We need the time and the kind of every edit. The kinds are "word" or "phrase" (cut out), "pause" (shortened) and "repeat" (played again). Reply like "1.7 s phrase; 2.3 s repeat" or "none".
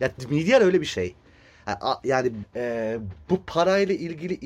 2.4 s word